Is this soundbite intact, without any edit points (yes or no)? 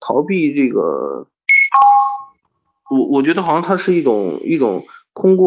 yes